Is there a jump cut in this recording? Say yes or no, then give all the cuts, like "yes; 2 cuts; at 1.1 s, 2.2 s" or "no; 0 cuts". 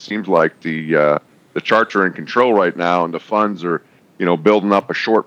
no; 0 cuts